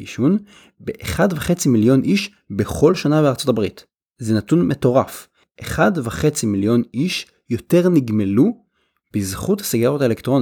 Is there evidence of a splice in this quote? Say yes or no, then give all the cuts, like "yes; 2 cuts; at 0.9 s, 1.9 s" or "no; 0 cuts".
no; 0 cuts